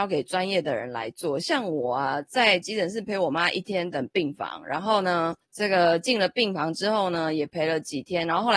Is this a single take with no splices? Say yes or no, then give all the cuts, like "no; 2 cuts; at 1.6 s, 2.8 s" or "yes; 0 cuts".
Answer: no; 1 cut; at 5.4 s